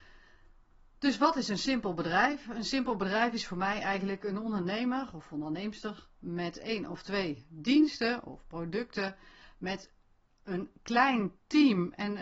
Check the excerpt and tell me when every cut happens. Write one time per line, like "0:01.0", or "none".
none